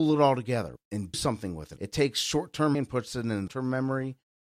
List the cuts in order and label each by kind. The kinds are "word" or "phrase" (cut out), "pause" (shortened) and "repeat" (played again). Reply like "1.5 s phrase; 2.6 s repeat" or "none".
1.1 s word; 2.7 s word; 3.5 s word